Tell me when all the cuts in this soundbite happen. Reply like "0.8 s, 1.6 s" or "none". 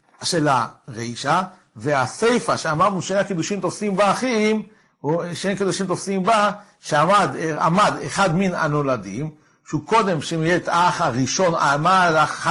none

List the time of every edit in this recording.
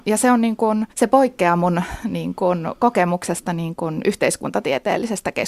0.9 s

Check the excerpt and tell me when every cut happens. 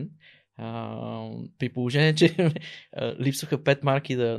2.9 s

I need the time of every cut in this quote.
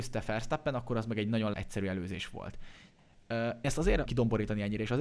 1.5 s, 3.6 s, 4.1 s

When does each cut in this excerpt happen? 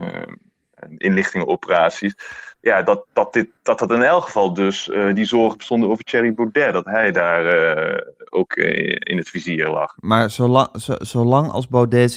2.5 s, 3.6 s

